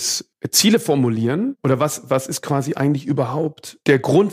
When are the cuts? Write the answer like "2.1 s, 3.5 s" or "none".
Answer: none